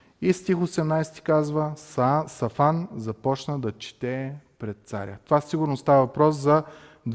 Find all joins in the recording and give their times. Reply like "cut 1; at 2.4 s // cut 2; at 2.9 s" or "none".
none